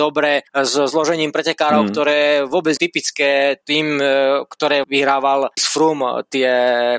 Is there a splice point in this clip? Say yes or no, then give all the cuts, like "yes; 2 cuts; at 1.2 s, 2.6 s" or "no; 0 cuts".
yes; 3 cuts; at 2.8 s, 4.8 s, 5.6 s